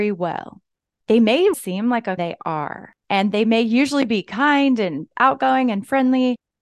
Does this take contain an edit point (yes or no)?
yes